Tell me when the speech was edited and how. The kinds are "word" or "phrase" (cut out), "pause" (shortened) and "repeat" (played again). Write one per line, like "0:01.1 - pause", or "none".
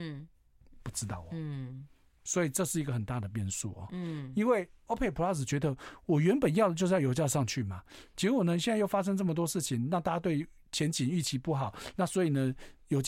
none